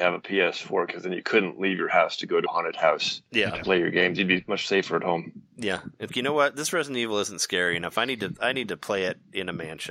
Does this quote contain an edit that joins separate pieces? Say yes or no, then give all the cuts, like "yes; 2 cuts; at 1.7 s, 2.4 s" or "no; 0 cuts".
yes; 2 cuts; at 2.5 s, 6.1 s